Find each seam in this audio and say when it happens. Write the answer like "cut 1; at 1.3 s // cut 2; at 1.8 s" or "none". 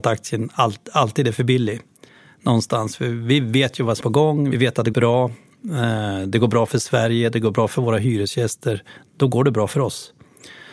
cut 1; at 4.0 s // cut 2; at 4.9 s